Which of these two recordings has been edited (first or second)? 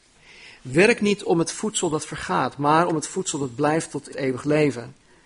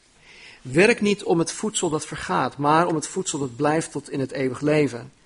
first